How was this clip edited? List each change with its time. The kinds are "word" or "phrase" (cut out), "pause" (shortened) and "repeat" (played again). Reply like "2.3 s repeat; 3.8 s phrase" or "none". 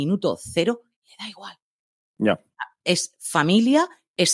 none